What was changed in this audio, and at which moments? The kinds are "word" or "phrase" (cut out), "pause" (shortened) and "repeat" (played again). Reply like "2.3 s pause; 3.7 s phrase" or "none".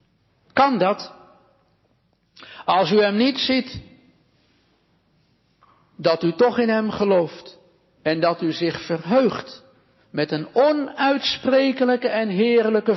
none